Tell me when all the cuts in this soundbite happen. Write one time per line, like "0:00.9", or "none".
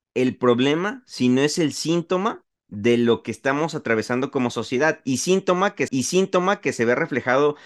0:02.6
0:05.9